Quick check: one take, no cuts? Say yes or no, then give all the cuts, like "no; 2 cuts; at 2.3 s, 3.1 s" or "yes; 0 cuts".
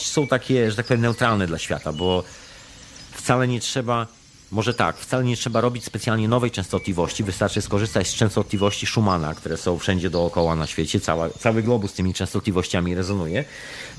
yes; 0 cuts